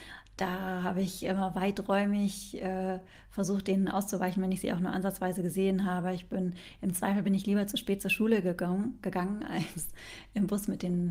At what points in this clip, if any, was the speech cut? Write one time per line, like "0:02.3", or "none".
none